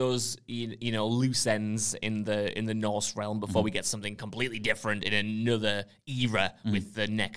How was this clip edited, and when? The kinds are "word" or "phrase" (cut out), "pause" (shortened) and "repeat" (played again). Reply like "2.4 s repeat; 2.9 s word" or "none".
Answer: none

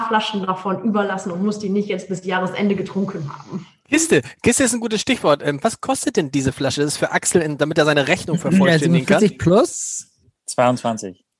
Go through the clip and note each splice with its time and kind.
none

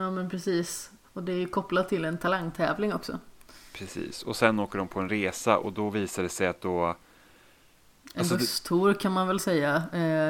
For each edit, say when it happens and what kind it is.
none

